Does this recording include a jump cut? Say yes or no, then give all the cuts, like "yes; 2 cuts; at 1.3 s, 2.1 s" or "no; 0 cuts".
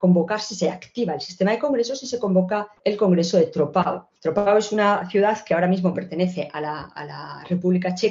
yes; 2 cuts; at 2.8 s, 4.2 s